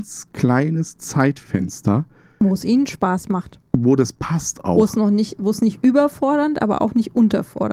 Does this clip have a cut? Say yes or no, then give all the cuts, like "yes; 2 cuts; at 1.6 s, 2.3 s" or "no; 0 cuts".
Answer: no; 0 cuts